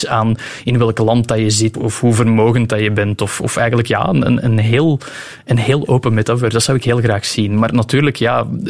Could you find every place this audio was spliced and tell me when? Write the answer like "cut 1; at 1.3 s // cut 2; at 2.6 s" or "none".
cut 1; at 1.7 s